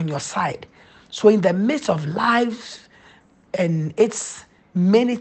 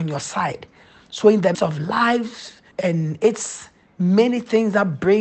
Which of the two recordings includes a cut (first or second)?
second